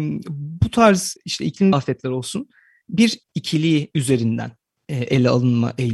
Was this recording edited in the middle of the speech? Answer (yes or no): yes